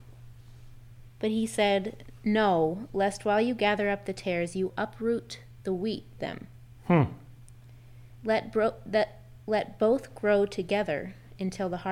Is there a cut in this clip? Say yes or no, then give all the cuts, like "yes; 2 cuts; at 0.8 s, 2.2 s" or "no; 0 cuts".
yes; 3 cuts; at 4.7 s, 6.2 s, 8.1 s